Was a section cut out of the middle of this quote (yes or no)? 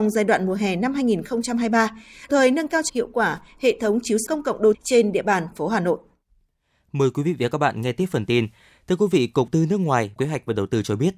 yes